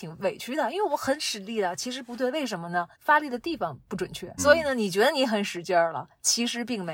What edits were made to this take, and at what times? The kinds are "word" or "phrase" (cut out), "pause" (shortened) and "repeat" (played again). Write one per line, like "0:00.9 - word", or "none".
0:02.9 - pause
0:04.4 - word